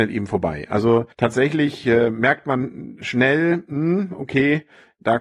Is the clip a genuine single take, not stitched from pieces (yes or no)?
no